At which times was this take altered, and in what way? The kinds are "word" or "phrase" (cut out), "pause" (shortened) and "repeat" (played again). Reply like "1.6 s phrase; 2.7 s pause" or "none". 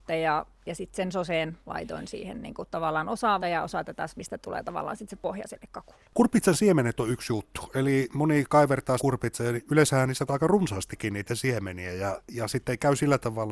3.4 s word; 4.1 s word; 9.0 s word; 10.3 s word